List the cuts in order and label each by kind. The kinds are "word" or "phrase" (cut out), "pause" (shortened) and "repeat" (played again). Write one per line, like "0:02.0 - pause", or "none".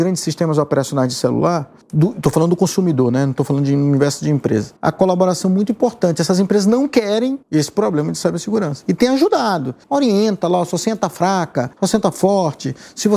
0:01.8 - pause
0:04.8 - pause
0:07.4 - pause
0:09.8 - pause
0:11.7 - pause